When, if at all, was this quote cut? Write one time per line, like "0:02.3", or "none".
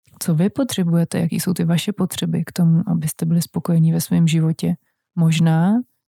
none